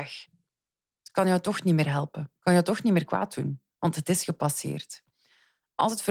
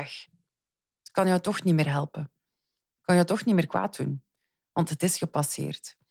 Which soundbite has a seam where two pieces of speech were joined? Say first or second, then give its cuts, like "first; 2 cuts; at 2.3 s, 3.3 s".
first; 2 cuts; at 2.4 s, 3.7 s